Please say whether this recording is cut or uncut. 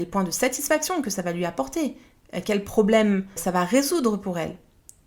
cut